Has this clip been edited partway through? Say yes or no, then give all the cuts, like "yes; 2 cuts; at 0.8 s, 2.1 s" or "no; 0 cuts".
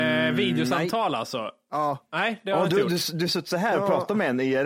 no; 0 cuts